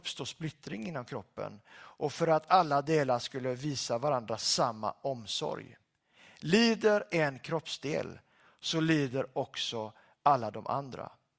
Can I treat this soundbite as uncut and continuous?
yes; 0 cuts

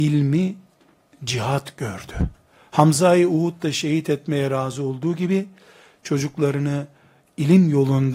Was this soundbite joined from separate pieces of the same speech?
no; 0 cuts

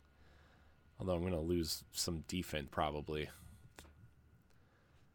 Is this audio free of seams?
no; 1 cut; at 2.7 s

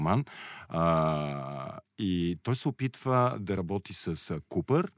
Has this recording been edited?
no; 0 cuts

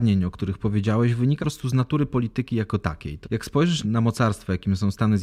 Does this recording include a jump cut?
yes; 3 cuts; at 1.4 s, 3.2 s, 3.8 s

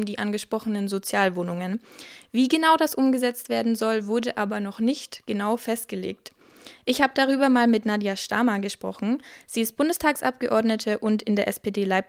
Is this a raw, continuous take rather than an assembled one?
yes; 0 cuts

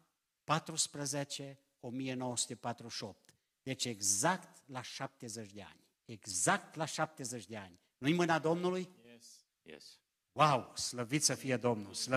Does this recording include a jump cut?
yes; 1 cut; at 6.0 s

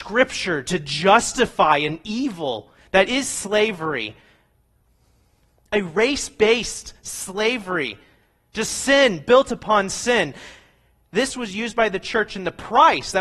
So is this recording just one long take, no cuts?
yes; 0 cuts

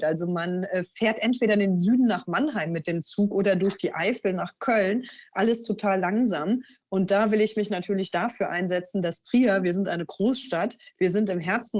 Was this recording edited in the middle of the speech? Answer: no; 0 cuts

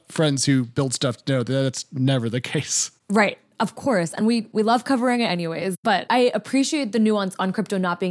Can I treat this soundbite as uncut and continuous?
yes; 0 cuts

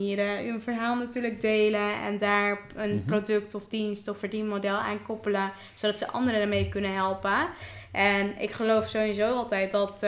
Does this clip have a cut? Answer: no; 0 cuts

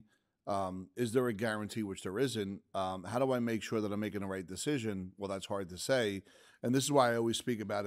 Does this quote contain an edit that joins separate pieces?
no; 0 cuts

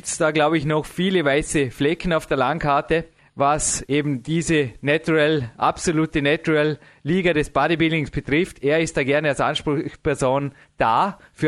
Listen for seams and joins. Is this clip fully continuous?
yes; 0 cuts

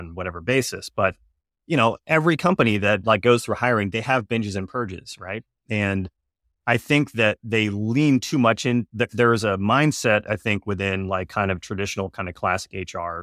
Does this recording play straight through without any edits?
yes; 0 cuts

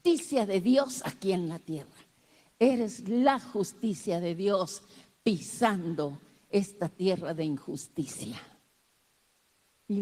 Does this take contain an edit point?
no; 0 cuts

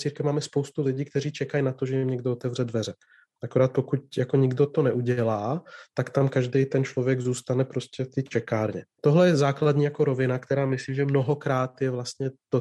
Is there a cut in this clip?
no; 0 cuts

